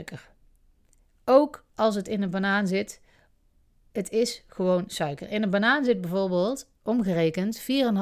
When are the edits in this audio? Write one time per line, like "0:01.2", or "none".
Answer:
none